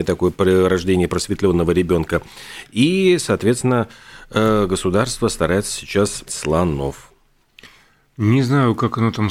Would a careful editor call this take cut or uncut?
cut